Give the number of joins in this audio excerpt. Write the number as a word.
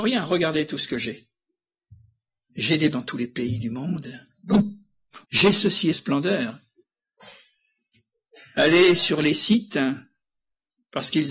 three